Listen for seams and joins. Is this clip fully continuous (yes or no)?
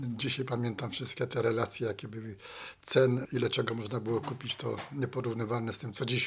yes